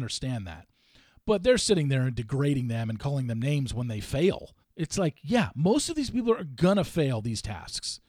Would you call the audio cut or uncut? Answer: cut